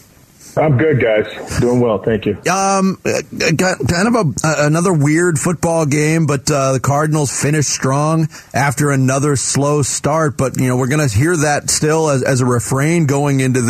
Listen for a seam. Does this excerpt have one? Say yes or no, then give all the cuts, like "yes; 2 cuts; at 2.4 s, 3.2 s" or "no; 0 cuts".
no; 0 cuts